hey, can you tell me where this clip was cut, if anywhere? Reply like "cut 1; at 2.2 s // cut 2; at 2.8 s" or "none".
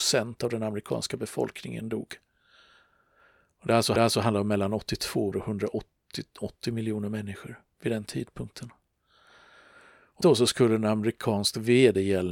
cut 1; at 4.0 s // cut 2; at 5.3 s // cut 3; at 7.7 s // cut 4; at 10.2 s